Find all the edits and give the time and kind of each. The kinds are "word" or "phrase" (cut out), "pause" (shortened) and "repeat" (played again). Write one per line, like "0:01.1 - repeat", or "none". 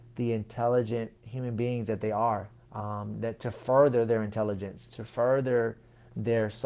0:01.2 - pause
0:02.6 - pause